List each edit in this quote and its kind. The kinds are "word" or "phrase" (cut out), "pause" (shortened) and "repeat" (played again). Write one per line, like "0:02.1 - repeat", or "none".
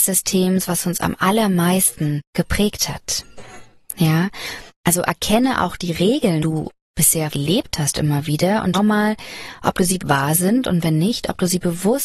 0:02.3 - pause
0:04.7 - pause
0:06.4 - phrase
0:07.3 - word
0:08.7 - word
0:10.0 - phrase